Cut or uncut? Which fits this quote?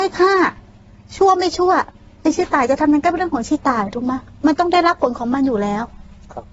uncut